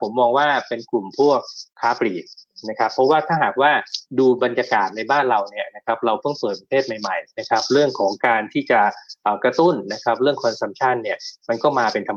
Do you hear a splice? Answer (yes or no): no